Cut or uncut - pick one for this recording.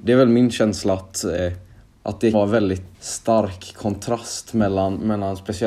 cut